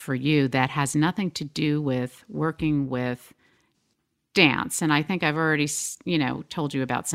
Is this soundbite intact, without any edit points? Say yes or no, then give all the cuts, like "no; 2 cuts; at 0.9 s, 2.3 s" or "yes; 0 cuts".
yes; 0 cuts